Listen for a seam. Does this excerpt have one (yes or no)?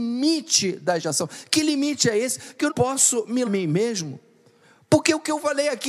yes